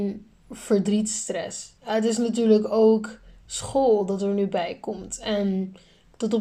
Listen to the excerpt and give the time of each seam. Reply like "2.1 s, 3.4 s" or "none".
1.8 s